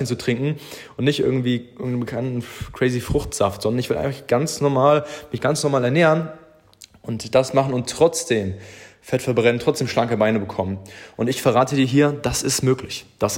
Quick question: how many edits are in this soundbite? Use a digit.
0